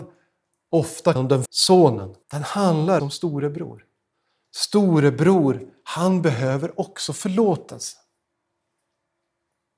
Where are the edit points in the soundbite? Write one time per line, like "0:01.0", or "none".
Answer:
0:01.2
0:01.5
0:02.2
0:03.0
0:04.1